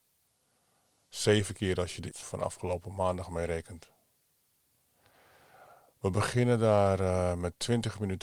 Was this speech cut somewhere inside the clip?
yes; 1 cut; at 2.1 s

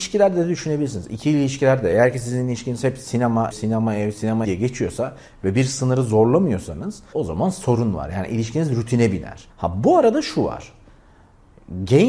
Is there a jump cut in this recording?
yes; 4 cuts; at 3.5 s, 4.4 s, 7.1 s, 9.5 s

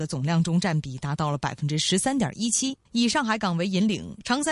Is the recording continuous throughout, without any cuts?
no; 1 cut; at 2.9 s

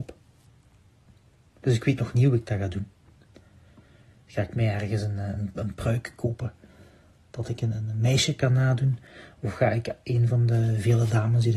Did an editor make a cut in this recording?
no; 0 cuts

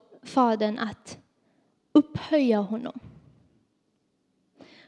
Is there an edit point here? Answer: no; 0 cuts

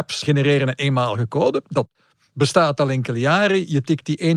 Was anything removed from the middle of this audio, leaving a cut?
no; 0 cuts

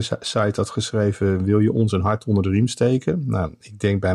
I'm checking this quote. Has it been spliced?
no; 0 cuts

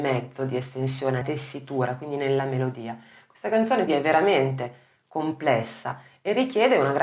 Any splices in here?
yes; 2 cuts; at 1.2 s, 3.9 s

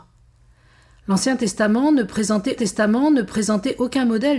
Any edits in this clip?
yes; 1 cut; at 2.6 s

